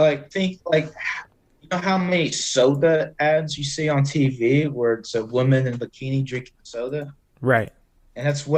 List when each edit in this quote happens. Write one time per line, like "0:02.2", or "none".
none